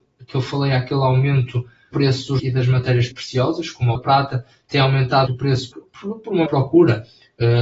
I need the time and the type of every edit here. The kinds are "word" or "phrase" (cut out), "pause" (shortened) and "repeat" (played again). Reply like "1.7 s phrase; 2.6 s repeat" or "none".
1.9 s word; 2.4 s word; 3.1 s word; 3.9 s word; 5.3 s word; 5.7 s word; 6.5 s word